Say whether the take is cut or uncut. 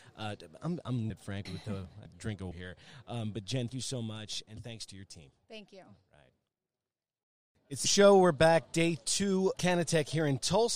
cut